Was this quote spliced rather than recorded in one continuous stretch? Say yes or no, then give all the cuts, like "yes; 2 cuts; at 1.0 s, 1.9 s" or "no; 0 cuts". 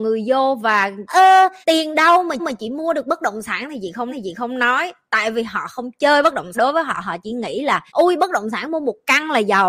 yes; 6 cuts; at 1.1 s, 1.6 s, 2.4 s, 4.1 s, 6.5 s, 7.9 s